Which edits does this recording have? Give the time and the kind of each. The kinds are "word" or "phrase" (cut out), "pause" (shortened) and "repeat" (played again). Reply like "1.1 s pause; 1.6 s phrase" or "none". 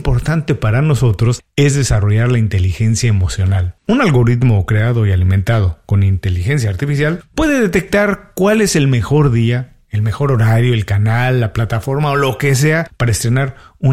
3.8 s pause